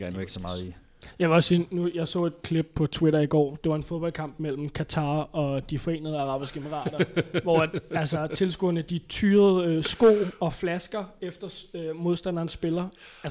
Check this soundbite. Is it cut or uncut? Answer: uncut